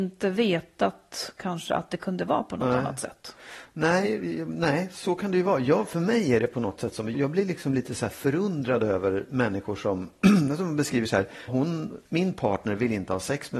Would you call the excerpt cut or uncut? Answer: cut